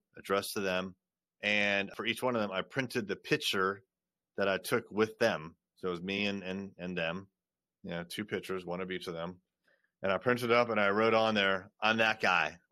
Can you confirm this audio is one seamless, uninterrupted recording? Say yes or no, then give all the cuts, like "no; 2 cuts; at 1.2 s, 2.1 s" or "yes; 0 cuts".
yes; 0 cuts